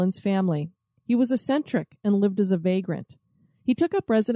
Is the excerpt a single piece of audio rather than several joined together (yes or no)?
yes